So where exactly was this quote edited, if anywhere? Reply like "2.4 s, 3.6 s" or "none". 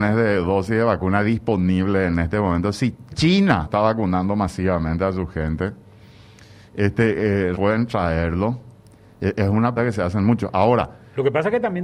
3.6 s, 7.5 s, 9.8 s